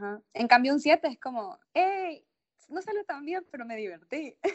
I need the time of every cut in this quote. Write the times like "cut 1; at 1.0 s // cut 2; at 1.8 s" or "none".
cut 1; at 1.6 s